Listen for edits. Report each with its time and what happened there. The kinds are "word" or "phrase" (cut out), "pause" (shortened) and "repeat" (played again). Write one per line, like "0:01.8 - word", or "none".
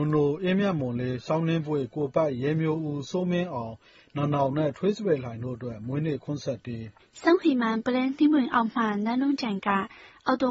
0:07.0 - pause